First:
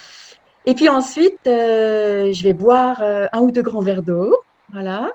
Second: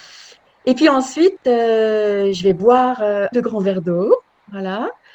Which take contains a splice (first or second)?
second